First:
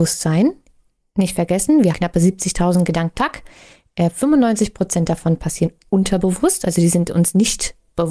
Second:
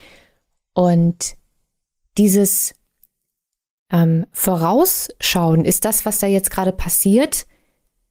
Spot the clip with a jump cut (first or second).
first